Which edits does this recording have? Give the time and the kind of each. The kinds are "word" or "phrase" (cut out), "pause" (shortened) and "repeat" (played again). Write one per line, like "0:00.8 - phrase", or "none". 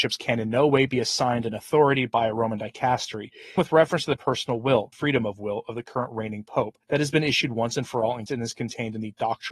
0:03.6 - word
0:04.9 - word
0:06.8 - pause
0:08.3 - word